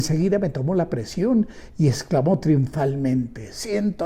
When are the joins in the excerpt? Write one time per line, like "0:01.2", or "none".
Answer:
none

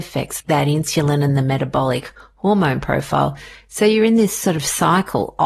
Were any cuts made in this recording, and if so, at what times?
none

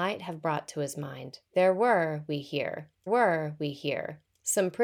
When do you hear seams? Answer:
0:01.5
0:03.1

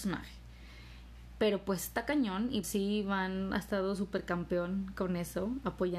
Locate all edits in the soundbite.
0:02.6

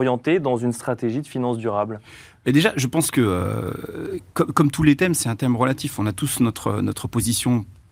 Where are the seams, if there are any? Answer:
none

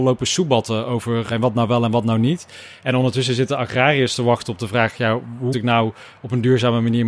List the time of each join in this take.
0:01.3
0:05.5

